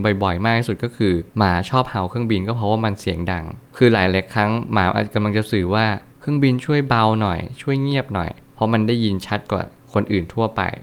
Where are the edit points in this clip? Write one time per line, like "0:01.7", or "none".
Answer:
0:01.3